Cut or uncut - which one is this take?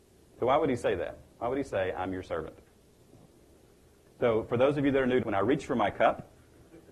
cut